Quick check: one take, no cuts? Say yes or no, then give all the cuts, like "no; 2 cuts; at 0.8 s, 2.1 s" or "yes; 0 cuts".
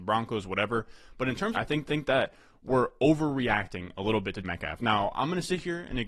no; 3 cuts; at 1.5 s, 1.9 s, 4.4 s